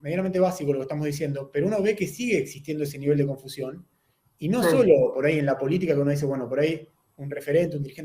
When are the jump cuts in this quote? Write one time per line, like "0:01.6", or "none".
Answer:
none